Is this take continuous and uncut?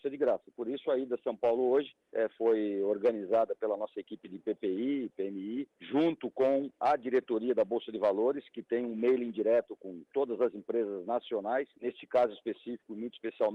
no; 3 cuts; at 2.0 s, 5.7 s, 11.7 s

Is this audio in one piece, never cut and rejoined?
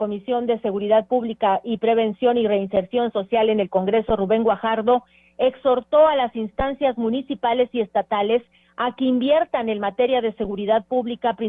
yes; 0 cuts

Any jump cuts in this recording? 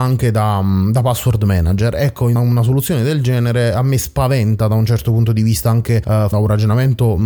yes; 1 cut; at 2.4 s

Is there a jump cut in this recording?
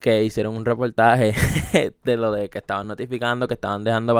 no; 0 cuts

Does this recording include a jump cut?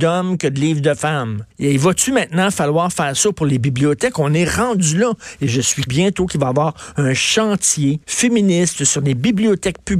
yes; 3 cuts; at 1.5 s, 5.9 s, 8.0 s

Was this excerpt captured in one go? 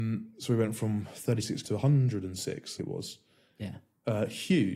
no; 2 cuts; at 1.6 s, 2.8 s

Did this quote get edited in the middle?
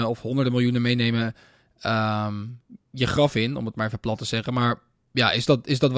no; 0 cuts

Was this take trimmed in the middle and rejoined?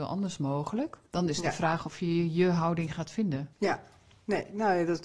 yes; 2 cuts; at 1.1 s, 3.5 s

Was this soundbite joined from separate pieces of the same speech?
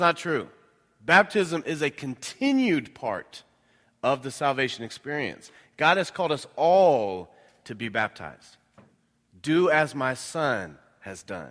no; 0 cuts

